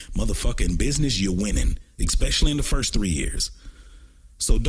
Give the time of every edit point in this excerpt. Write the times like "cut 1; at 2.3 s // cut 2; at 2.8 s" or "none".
none

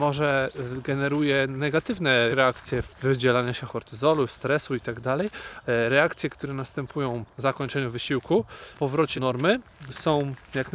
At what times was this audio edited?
cut 1; at 2.3 s // cut 2; at 2.9 s // cut 3; at 3.7 s // cut 4; at 5.6 s // cut 5; at 7.3 s // cut 6; at 8.7 s // cut 7; at 9.2 s

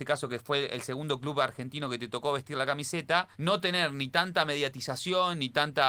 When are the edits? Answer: cut 1; at 3.3 s

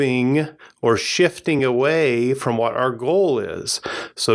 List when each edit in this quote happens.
none

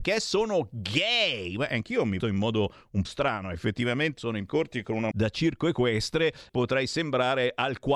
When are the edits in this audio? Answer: cut 1; at 2.2 s // cut 2; at 3.0 s // cut 3; at 4.2 s // cut 4; at 4.5 s // cut 5; at 5.1 s // cut 6; at 6.5 s

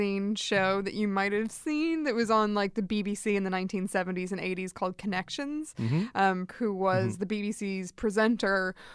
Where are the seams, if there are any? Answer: cut 1; at 6.5 s

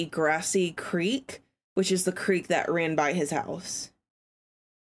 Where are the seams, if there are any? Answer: none

